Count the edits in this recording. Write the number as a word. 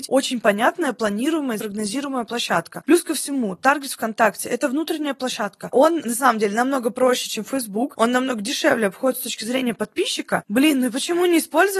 one